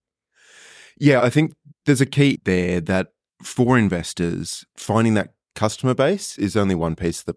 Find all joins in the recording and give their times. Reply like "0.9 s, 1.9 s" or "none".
1.2 s, 2.3 s, 4.7 s, 6.4 s